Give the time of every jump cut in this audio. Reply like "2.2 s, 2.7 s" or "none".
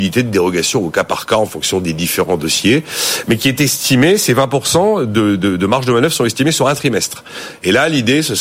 none

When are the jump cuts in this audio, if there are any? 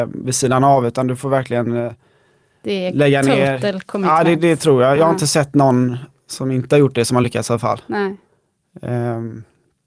none

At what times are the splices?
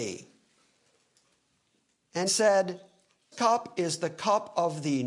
2.3 s, 3.3 s

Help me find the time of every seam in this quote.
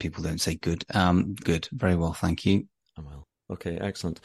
1.4 s

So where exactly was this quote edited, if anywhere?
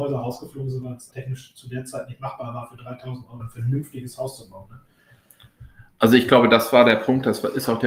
1.1 s, 3.4 s

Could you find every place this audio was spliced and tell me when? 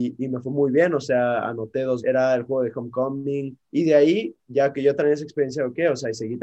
2.0 s, 3.6 s, 4.7 s

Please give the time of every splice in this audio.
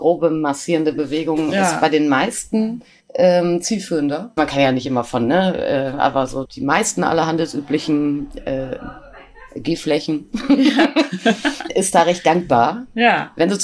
4.4 s, 6.4 s, 11.7 s

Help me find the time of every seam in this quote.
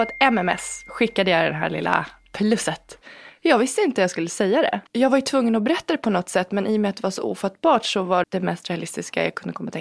4.9 s, 8.2 s

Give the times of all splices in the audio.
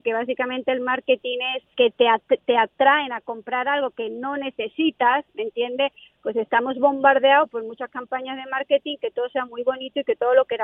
1.7 s, 9.0 s

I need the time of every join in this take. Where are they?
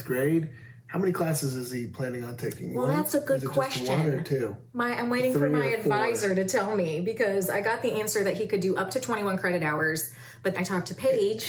4.7 s, 10.5 s

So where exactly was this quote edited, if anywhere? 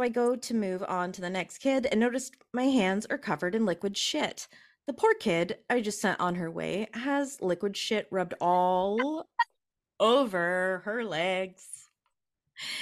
none

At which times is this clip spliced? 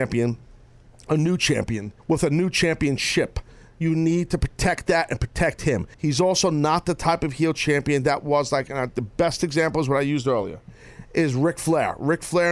2.0 s, 5.9 s

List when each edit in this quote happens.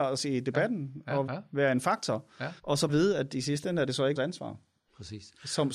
1.3 s, 2.6 s, 2.9 s, 4.2 s

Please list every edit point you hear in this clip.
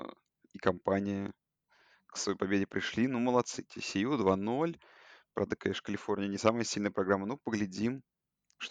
none

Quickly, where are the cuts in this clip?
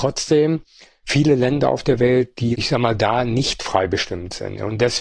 none

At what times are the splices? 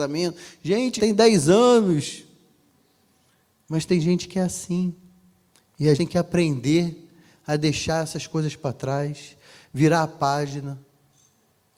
1.0 s, 5.9 s

